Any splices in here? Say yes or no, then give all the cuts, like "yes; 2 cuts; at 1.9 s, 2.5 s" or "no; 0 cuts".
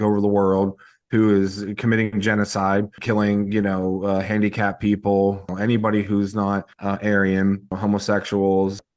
yes; 1 cut; at 6.7 s